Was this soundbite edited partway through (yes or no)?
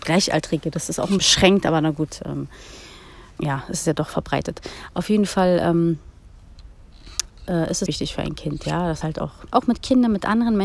yes